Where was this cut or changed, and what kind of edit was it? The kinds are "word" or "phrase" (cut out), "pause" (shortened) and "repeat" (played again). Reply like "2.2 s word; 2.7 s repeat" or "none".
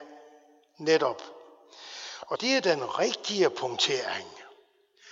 2.4 s word